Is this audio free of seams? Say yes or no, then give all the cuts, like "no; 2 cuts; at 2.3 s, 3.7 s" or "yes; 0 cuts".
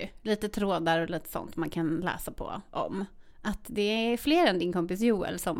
no; 1 cut; at 3.3 s